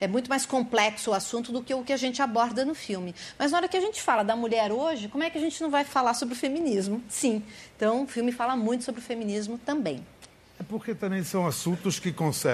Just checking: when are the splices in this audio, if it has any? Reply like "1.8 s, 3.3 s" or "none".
none